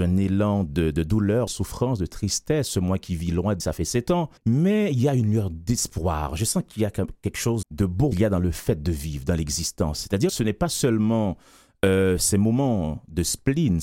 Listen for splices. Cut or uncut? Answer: cut